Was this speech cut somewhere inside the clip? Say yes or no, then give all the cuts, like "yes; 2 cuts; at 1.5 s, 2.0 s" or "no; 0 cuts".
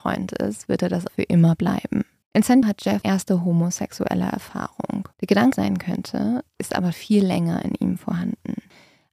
yes; 8 cuts; at 1.1 s, 2.2 s, 2.6 s, 3.0 s, 5.1 s, 5.5 s, 6.5 s, 6.9 s